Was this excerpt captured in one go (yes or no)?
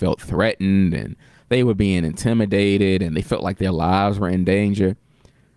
yes